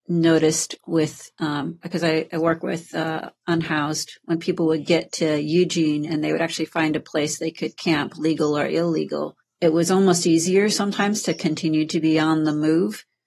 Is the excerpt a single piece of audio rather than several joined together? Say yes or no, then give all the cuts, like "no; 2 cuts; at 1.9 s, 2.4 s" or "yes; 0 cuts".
no; 1 cut; at 9.4 s